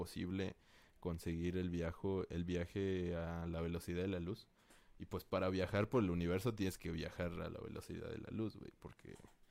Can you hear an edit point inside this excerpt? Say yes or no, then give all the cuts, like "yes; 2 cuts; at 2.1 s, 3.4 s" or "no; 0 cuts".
no; 0 cuts